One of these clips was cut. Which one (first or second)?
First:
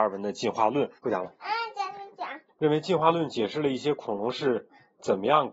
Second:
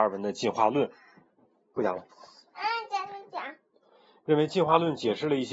first